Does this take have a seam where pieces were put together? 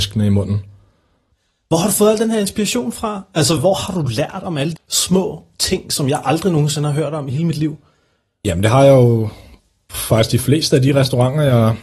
yes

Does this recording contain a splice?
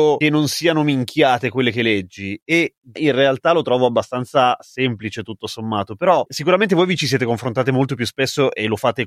yes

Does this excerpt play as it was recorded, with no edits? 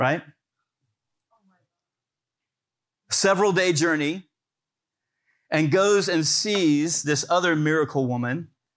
yes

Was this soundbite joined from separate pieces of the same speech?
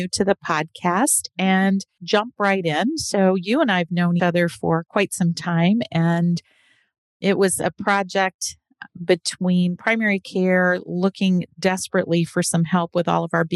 yes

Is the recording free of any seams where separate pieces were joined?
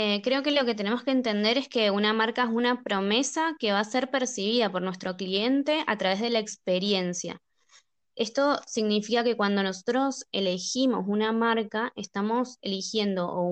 yes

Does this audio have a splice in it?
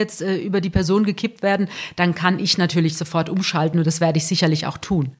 no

